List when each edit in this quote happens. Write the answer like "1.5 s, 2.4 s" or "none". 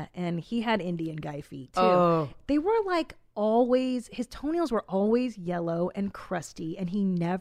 none